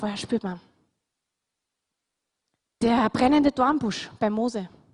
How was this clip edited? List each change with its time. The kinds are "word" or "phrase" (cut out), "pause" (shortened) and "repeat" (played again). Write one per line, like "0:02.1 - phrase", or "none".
none